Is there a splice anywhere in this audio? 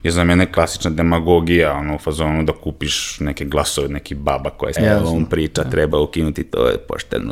yes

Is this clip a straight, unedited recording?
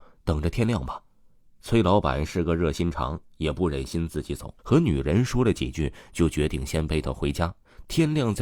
no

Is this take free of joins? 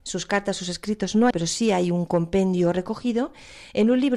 no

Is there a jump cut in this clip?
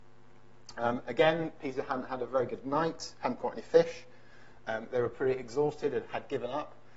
no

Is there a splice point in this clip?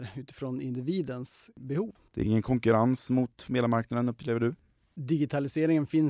no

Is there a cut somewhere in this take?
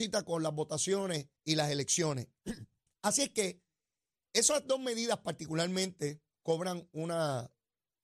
yes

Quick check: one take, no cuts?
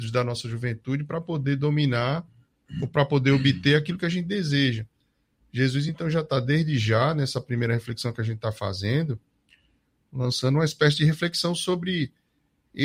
yes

